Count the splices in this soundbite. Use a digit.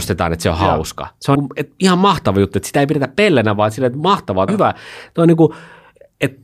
2